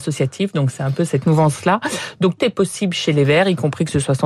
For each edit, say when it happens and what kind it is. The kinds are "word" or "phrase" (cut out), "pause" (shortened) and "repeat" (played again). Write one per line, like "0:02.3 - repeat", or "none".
0:02.4 - word